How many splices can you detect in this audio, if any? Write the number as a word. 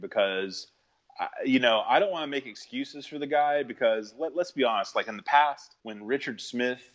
one